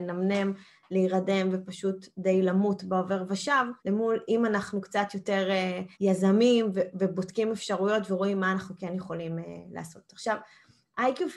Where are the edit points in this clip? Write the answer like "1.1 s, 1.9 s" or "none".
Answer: 3.8 s, 5.9 s